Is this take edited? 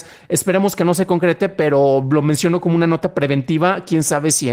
no; 0 cuts

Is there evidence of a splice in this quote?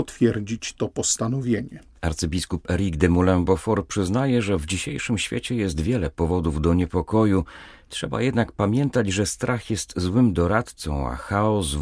no; 0 cuts

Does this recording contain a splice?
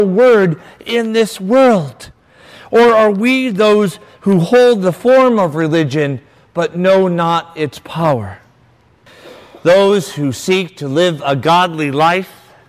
no; 0 cuts

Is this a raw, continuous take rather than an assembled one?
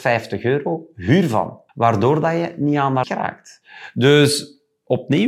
no; 2 cuts; at 1.7 s, 3.0 s

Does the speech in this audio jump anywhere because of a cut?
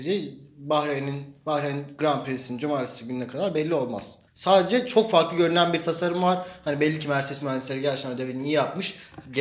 yes; 1 cut; at 4.3 s

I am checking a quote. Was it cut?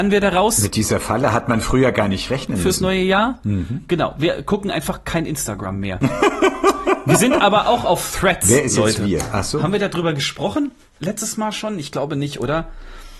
no; 0 cuts

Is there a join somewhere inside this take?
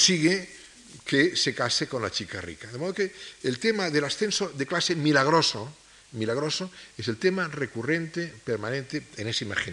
no; 0 cuts

